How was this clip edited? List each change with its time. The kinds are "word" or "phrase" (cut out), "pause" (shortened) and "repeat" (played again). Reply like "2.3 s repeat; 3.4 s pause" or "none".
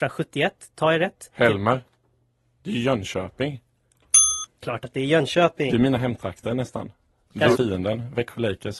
7.5 s word